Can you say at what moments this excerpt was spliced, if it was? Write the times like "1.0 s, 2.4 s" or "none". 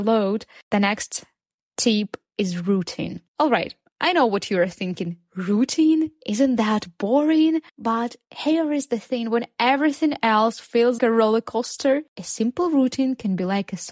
3.3 s, 7.7 s, 11.0 s